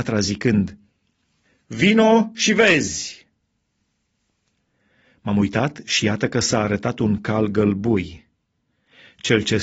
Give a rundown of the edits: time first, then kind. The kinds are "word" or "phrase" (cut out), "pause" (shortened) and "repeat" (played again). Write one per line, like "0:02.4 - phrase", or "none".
none

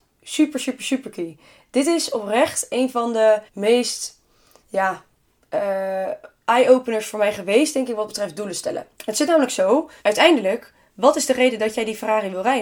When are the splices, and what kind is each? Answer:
0:03.5 - pause
0:08.9 - pause
0:10.0 - pause

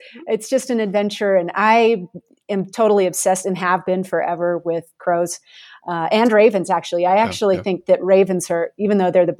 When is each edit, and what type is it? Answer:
none

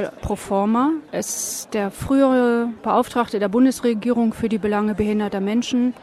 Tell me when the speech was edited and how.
none

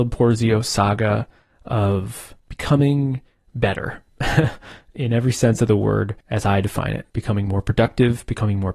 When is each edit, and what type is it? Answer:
0:02.4 - pause
0:06.2 - pause
0:07.1 - pause

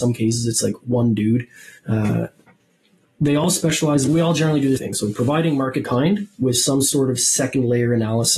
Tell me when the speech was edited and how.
0:01.8 - pause
0:04.1 - phrase
0:04.8 - word
0:05.8 - phrase

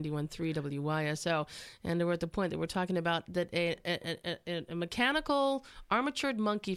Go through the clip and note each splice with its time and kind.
none

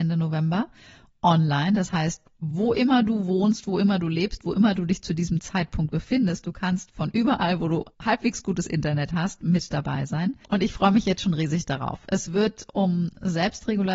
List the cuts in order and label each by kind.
0:07.9 - pause
0:10.4 - pause

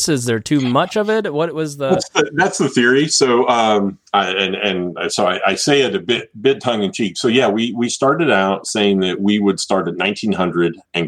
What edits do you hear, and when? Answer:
0:04.1 - pause

